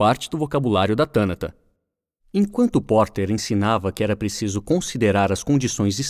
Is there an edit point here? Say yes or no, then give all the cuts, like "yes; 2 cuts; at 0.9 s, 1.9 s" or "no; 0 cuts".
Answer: no; 0 cuts